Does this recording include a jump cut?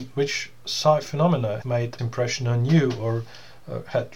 yes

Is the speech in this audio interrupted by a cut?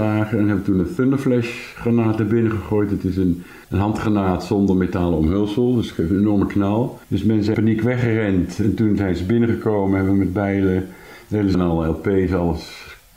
yes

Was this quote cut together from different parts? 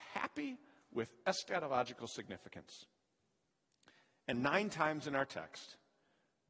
yes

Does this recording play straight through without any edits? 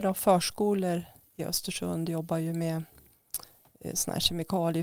yes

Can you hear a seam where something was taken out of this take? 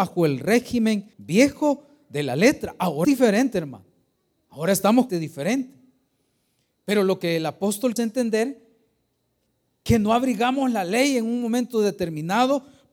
yes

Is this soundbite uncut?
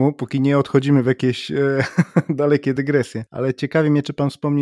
yes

